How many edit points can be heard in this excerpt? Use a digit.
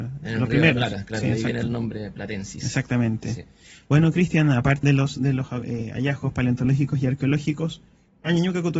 1